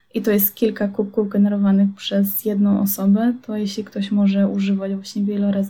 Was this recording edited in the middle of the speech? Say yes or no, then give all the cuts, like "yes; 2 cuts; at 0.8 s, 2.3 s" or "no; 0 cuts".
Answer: no; 0 cuts